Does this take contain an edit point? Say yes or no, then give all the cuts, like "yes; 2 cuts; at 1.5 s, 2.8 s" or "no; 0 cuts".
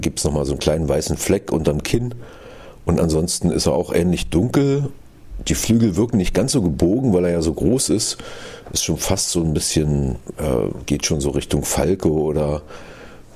no; 0 cuts